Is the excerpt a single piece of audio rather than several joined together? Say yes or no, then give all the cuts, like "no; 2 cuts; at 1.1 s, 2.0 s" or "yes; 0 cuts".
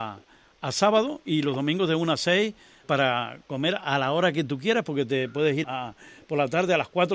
no; 2 cuts; at 2.8 s, 5.6 s